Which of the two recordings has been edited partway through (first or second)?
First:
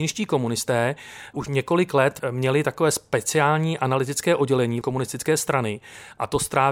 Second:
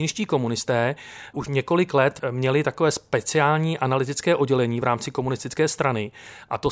first